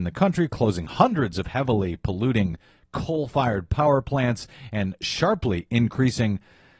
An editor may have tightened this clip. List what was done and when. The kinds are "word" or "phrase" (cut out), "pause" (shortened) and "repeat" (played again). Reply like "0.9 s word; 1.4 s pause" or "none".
none

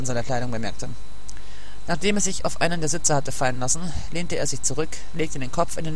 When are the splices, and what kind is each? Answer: none

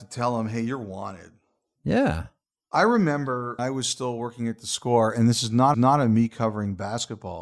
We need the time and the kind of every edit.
3.6 s word; 5.7 s repeat

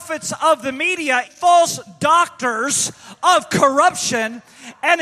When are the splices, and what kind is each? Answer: 1.2 s word

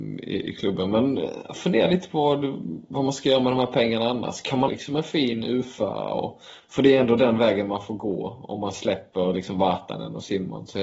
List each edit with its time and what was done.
4.7 s word

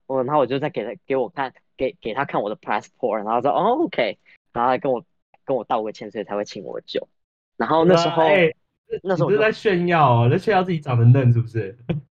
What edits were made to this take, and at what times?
none

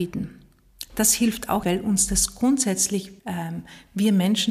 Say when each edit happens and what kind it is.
1.6 s word; 3.2 s pause

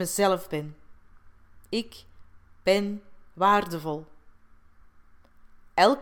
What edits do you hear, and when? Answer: 1.6 s pause

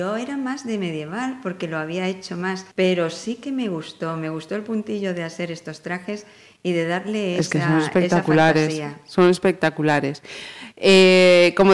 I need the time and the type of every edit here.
2.7 s pause

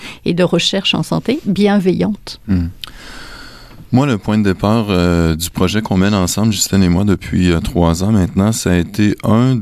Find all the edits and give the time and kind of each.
3.9 s pause

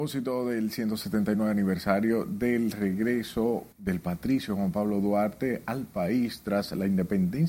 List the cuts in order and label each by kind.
3.7 s pause

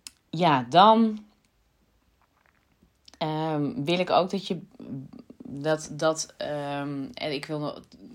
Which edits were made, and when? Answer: none

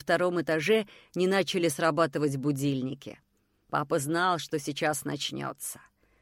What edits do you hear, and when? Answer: none

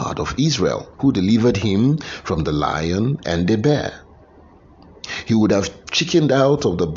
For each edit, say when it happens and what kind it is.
0.9 s pause

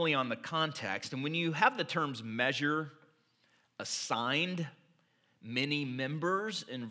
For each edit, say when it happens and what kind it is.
none

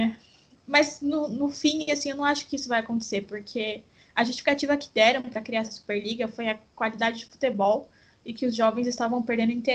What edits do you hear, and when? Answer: none

